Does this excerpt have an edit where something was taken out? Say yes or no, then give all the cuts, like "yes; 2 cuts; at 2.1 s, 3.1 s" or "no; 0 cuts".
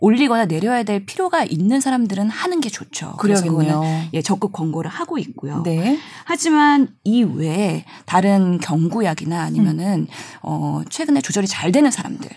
no; 0 cuts